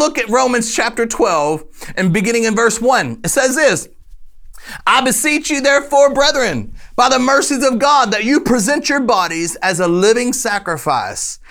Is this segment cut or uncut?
uncut